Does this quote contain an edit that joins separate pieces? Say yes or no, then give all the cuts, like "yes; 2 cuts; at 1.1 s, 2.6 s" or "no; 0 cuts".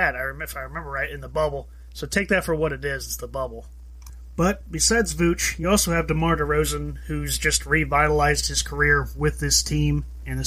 no; 0 cuts